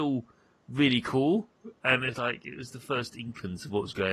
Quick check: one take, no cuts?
no; 1 cut; at 2.1 s

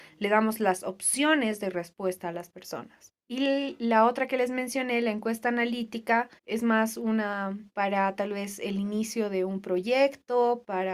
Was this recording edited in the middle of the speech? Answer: yes; 3 cuts; at 3.2 s, 6.4 s, 7.7 s

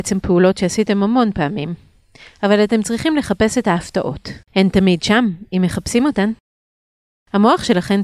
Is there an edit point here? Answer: yes; 1 cut; at 4.4 s

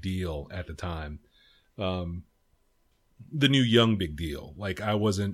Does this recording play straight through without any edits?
yes; 0 cuts

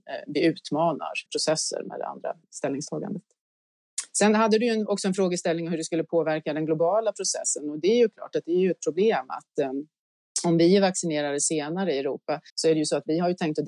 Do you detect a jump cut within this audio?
yes; 3 cuts; at 1.3 s, 2.4 s, 12.5 s

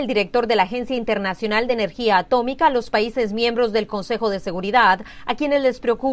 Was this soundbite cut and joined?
no; 0 cuts

